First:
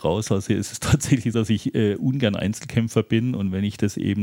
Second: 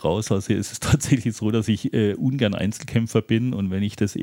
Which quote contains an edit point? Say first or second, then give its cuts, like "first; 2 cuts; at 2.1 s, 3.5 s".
first; 1 cut; at 1.3 s